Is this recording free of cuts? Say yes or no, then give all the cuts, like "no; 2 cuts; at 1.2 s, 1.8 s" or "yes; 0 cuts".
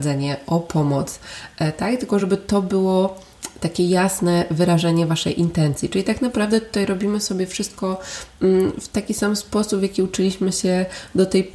yes; 0 cuts